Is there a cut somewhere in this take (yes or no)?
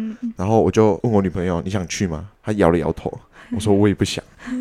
no